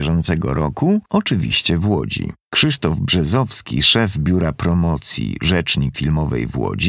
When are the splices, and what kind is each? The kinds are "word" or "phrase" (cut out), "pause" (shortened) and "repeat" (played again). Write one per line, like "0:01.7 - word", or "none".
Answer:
0:01.1 - pause
0:02.4 - pause
0:05.9 - word